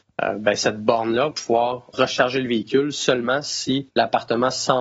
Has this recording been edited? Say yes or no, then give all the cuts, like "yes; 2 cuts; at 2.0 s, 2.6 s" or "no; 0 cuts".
yes; 3 cuts; at 1.3 s, 1.9 s, 3.9 s